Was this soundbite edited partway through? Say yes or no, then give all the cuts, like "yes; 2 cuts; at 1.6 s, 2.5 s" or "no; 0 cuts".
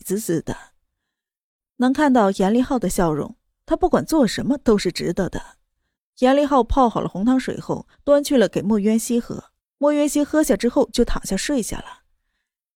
yes; 3 cuts; at 5.9 s, 7.9 s, 9.6 s